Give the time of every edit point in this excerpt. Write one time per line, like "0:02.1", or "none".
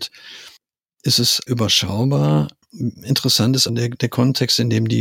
0:01.5
0:03.7